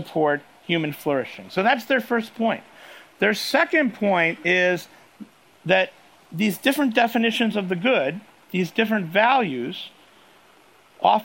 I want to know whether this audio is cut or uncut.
uncut